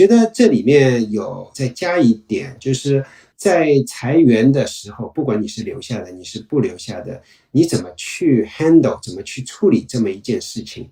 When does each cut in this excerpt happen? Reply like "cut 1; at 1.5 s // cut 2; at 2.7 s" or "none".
none